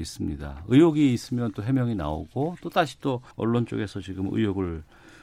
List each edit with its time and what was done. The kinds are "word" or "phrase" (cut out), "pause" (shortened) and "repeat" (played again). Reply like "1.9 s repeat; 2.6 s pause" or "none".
3.3 s pause